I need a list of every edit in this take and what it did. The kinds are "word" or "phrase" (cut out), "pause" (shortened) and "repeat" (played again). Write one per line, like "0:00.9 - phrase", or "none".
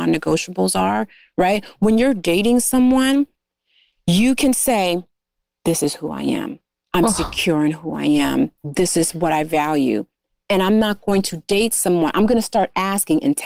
none